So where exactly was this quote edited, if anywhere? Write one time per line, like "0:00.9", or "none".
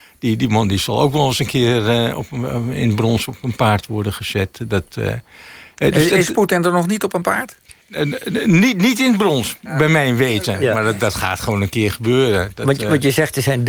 0:07.8